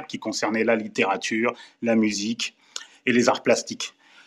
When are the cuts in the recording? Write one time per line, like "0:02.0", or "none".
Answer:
none

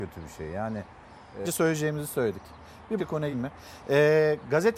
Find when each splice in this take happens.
0:01.4
0:03.0
0:03.3

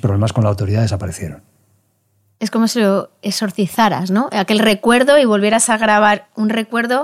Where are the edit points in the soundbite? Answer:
none

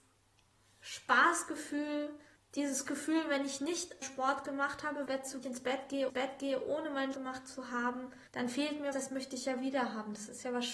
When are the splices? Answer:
0:02.4
0:04.0
0:05.1
0:05.4
0:06.1
0:07.1
0:08.3
0:08.9

